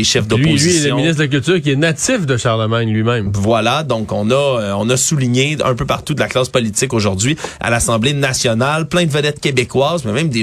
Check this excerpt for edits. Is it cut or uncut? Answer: uncut